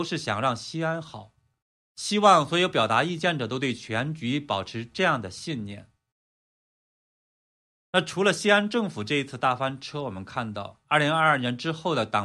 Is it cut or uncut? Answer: uncut